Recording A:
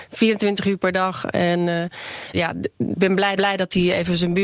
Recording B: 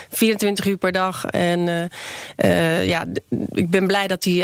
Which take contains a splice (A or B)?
A